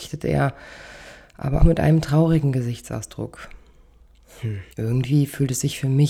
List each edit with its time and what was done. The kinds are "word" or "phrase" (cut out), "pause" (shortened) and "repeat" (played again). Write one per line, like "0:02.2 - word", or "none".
0:01.6 - word
0:04.7 - pause